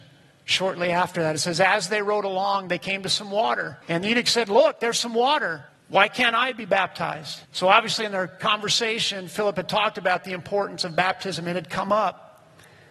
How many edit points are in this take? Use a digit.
3